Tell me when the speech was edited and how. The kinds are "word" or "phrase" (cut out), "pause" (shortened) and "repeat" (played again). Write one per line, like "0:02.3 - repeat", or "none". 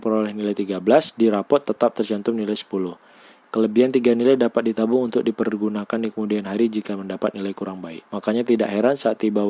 0:08.1 - pause